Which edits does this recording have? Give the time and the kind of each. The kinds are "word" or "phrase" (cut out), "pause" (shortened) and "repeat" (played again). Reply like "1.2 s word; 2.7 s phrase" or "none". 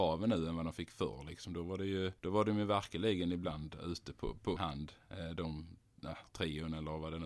2.2 s pause; 4.6 s word; 6.2 s word